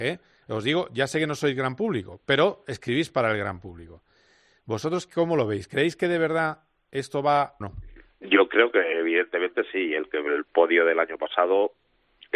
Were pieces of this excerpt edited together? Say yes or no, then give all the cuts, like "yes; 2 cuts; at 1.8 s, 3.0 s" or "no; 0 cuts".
yes; 1 cut; at 7.6 s